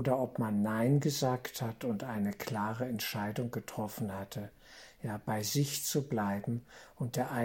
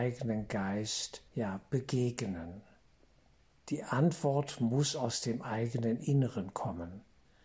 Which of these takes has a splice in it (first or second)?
second